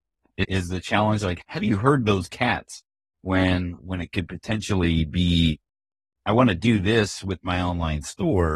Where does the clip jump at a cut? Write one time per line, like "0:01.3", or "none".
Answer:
none